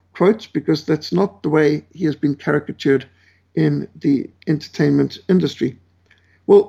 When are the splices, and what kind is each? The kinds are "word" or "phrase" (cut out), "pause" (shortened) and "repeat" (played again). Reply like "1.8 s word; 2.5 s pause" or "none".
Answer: none